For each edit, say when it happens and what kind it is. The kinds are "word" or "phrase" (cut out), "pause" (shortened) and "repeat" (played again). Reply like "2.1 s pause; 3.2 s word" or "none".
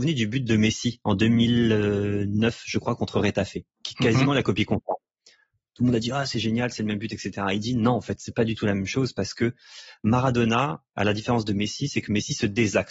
11.0 s word